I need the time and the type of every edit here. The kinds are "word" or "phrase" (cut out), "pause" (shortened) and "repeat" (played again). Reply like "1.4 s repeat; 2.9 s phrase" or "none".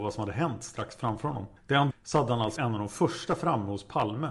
1.6 s pause; 1.9 s phrase; 2.6 s word